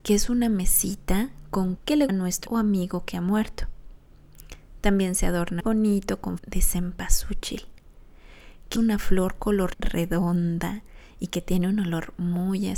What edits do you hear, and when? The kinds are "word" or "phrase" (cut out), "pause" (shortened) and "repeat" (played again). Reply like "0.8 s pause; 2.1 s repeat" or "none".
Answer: 1.8 s word; 2.1 s word; 2.5 s word; 5.6 s word; 6.4 s word; 8.8 s word; 9.7 s word

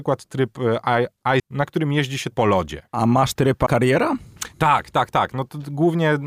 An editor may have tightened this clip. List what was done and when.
1.4 s word; 2.3 s word; 2.9 s pause; 3.4 s word; 3.7 s word

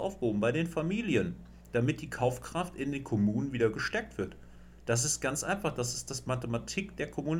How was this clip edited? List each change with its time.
none

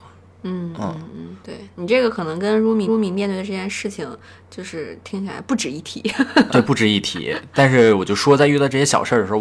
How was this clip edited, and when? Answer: 1.4 s pause; 2.9 s repeat; 6.5 s word

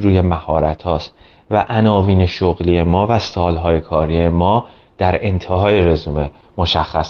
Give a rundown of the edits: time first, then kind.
none

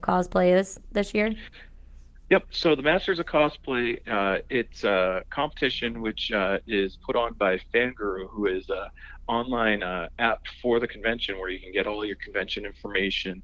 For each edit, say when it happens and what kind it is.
none

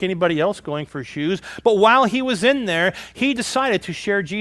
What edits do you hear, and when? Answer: none

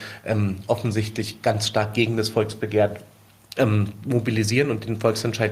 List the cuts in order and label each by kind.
none

